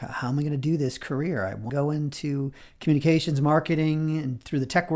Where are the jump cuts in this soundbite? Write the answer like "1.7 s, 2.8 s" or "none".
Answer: 1.7 s